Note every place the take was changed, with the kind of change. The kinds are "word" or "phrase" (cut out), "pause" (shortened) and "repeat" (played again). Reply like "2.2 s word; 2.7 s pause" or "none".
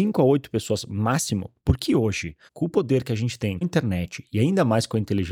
2.5 s pause; 3.6 s word